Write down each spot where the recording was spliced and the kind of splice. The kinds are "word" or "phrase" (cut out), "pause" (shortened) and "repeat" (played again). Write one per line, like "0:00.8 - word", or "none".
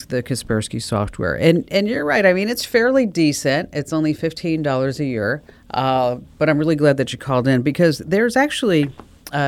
0:05.5 - pause